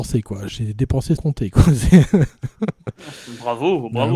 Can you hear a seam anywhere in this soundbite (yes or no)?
yes